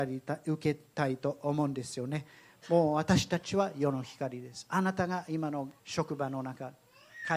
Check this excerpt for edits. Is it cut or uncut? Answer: cut